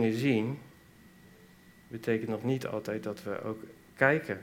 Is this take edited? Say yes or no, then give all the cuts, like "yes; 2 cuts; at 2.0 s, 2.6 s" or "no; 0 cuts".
no; 0 cuts